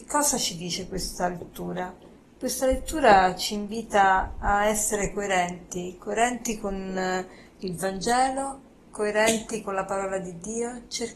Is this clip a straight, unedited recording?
yes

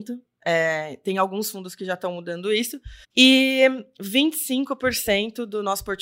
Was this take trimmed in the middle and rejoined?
yes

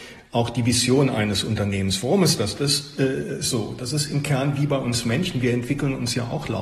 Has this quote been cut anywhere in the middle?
no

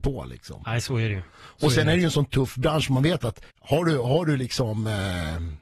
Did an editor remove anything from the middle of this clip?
yes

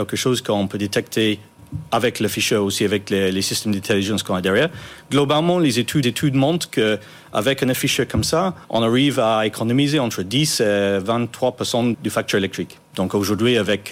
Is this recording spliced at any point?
yes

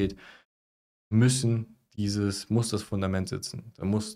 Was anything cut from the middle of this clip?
no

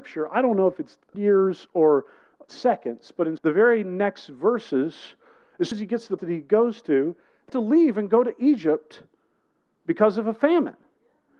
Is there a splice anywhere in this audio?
yes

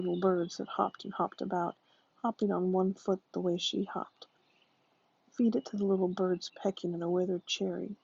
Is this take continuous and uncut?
no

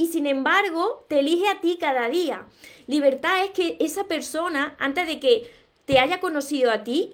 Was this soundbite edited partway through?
no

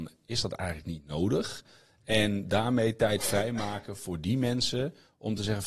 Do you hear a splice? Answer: no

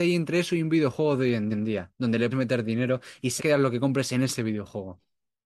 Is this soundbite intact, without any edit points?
no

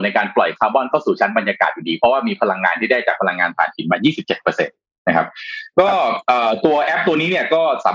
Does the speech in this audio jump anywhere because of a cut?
no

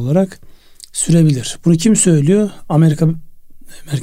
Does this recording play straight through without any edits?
yes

